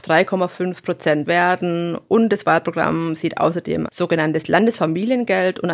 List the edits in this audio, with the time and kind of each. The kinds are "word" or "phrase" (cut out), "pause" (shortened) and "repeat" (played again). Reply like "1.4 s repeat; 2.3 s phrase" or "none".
1.2 s word; 3.9 s word

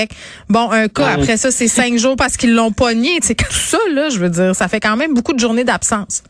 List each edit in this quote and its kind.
3.5 s word

